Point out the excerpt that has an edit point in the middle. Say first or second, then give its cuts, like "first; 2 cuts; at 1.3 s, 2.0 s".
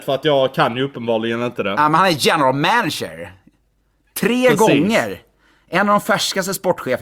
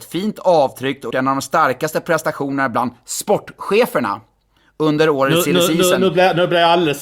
second; 1 cut; at 1.1 s